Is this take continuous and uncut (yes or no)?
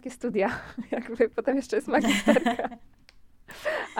yes